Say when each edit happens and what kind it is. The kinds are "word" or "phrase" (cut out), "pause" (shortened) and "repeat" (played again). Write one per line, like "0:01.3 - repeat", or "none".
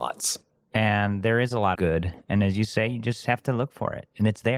0:01.8 - word

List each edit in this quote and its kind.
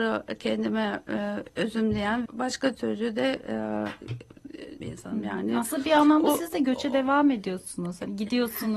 0:02.3 - word
0:04.8 - word

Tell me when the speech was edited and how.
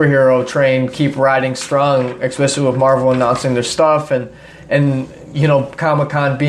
none

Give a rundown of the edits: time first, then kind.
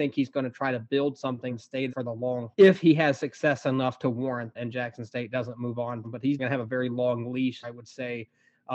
0:01.5 - word
0:01.9 - word
0:02.5 - word
0:04.5 - word
0:06.0 - word
0:06.4 - word
0:07.6 - word

